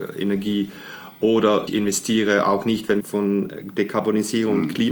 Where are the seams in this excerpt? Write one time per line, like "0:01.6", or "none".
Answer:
0:01.7
0:03.0